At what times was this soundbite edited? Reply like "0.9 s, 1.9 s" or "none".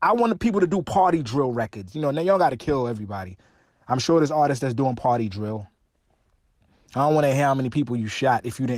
none